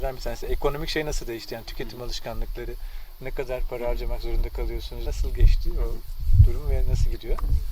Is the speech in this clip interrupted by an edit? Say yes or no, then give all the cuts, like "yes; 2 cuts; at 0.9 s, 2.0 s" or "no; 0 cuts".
yes; 1 cut; at 5.1 s